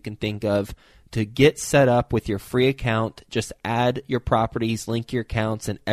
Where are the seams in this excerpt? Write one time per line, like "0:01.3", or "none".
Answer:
none